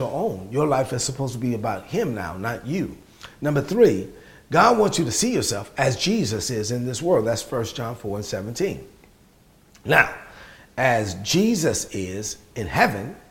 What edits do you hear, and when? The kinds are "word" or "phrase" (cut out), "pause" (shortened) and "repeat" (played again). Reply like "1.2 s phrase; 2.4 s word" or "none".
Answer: none